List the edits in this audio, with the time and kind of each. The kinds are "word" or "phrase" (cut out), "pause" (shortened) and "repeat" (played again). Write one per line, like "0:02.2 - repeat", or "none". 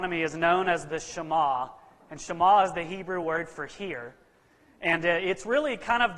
none